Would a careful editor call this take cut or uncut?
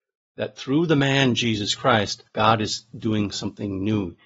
cut